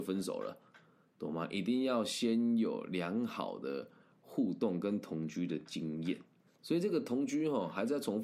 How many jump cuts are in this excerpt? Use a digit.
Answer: 1